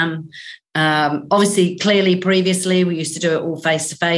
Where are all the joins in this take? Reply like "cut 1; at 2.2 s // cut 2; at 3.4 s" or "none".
none